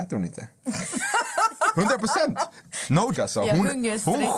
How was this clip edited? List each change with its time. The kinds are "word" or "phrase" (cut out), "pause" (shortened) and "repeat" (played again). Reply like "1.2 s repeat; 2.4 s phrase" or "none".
3.1 s word